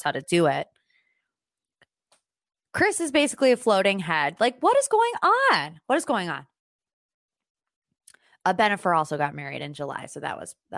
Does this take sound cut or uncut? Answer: uncut